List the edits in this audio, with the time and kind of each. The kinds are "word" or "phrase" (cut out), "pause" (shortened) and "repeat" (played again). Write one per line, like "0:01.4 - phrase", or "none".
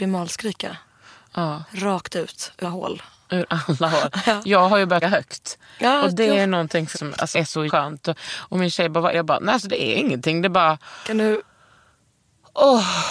0:02.6 - word
0:05.0 - word
0:06.9 - word
0:07.3 - word
0:07.7 - word
0:09.1 - word